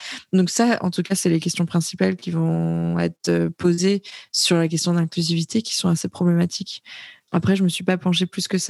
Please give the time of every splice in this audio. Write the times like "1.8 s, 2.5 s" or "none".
none